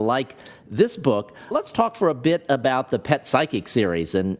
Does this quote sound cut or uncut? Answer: cut